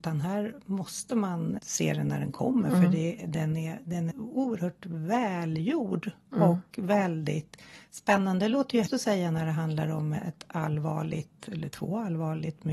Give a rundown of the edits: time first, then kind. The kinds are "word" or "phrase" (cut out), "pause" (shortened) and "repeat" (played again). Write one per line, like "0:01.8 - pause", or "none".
0:01.6 - word
0:04.1 - word
0:08.9 - word